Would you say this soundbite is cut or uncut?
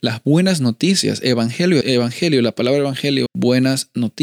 cut